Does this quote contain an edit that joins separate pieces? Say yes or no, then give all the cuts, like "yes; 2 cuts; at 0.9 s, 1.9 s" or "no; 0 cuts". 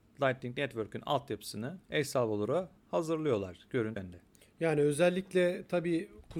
yes; 4 cuts; at 1.8 s, 2.8 s, 4.0 s, 4.3 s